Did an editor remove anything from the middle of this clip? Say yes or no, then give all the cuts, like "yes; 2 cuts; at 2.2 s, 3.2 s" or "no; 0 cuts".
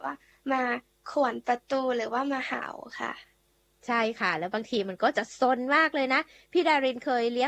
no; 0 cuts